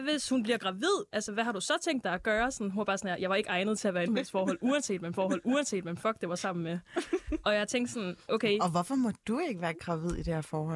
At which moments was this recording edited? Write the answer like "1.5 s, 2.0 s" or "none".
4.1 s, 5.1 s